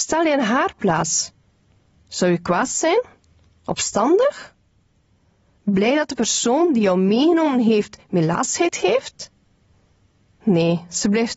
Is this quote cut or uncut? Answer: uncut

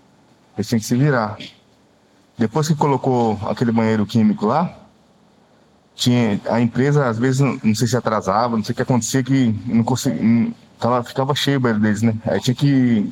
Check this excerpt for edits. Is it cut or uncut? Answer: uncut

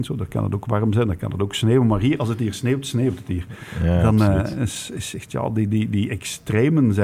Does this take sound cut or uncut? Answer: uncut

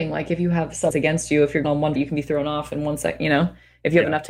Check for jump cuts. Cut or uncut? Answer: cut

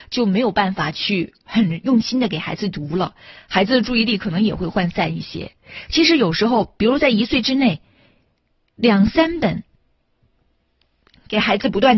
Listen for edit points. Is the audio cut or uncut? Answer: uncut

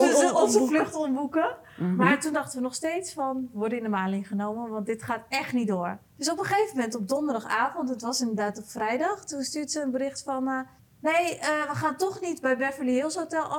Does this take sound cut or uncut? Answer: cut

